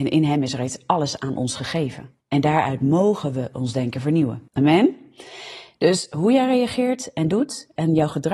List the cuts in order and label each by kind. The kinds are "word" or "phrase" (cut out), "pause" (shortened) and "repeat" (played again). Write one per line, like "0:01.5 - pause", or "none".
0:02.2 - pause
0:04.5 - pause